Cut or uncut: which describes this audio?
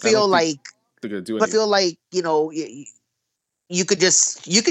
cut